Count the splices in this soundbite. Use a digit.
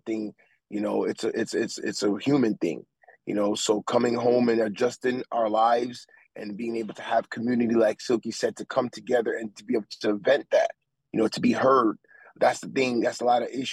0